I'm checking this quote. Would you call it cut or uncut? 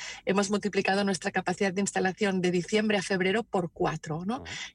uncut